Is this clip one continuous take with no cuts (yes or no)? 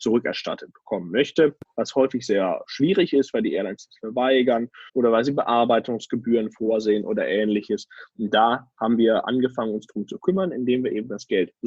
no